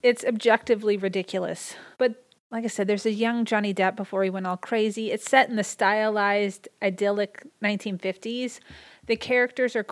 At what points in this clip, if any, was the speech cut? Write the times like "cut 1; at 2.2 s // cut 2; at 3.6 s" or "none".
cut 1; at 1.9 s

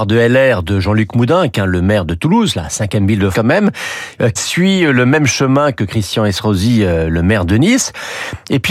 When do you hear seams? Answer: cut 1; at 3.3 s // cut 2; at 4.4 s

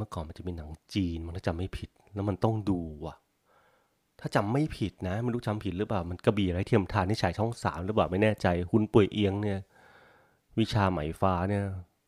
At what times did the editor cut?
none

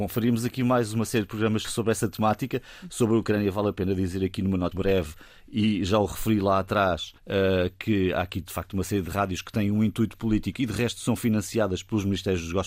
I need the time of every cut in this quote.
cut 1; at 1.6 s // cut 2; at 4.7 s // cut 3; at 7.2 s

